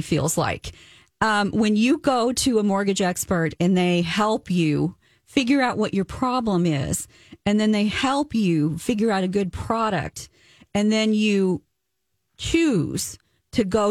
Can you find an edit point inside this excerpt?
no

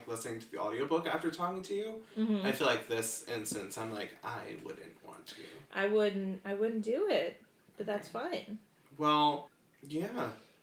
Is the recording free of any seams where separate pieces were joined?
yes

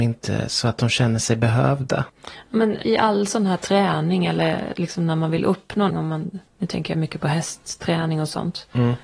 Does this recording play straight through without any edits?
no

